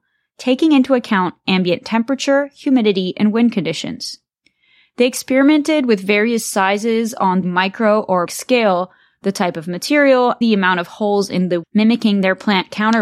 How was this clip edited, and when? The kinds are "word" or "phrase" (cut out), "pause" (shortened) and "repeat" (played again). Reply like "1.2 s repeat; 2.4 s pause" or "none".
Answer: 7.4 s word; 8.3 s word; 10.4 s word; 11.6 s word